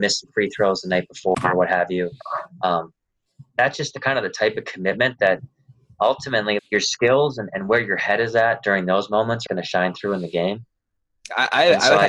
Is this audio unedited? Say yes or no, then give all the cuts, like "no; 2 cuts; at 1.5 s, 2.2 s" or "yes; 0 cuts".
no; 3 cuts; at 3.5 s, 6.6 s, 9.5 s